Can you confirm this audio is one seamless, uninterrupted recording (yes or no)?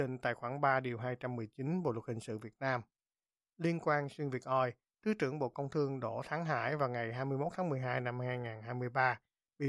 yes